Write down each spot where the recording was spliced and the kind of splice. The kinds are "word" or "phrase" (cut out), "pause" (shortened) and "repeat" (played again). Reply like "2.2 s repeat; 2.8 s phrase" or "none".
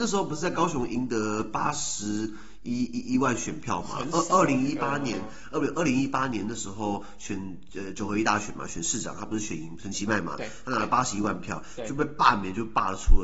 none